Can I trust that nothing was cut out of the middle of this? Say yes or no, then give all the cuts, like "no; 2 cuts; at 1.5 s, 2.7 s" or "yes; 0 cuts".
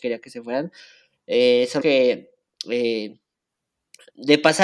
no; 1 cut; at 1.8 s